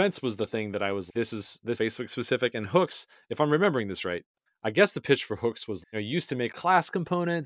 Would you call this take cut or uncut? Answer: cut